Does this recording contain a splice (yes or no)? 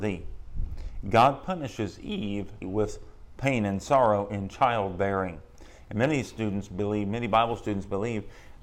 yes